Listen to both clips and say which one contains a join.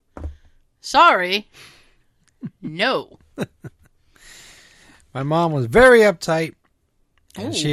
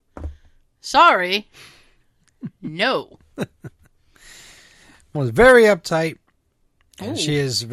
second; 1 cut; at 5.1 s

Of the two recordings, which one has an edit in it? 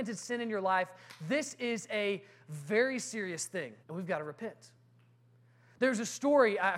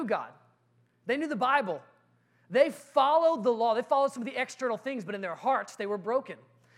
first; 1 cut; at 3.8 s

